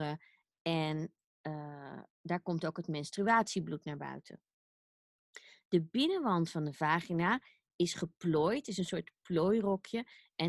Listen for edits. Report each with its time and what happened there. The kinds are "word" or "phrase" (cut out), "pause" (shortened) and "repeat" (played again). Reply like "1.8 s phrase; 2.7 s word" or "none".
none